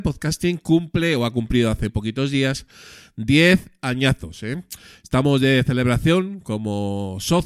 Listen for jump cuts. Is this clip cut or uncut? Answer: cut